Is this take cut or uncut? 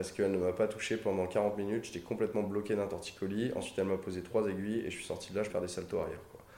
cut